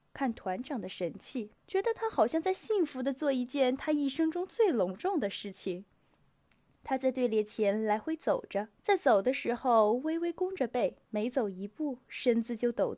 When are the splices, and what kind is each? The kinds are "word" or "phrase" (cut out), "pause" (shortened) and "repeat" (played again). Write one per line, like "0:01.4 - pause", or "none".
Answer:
0:01.6 - pause
0:08.8 - pause
0:11.0 - pause